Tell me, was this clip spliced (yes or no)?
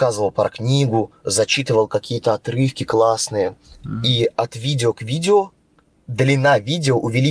no